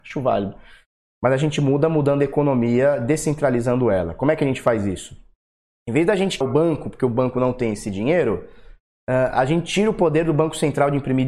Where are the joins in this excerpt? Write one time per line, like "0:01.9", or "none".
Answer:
0:06.4